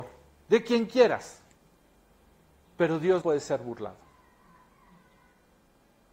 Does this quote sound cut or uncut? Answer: cut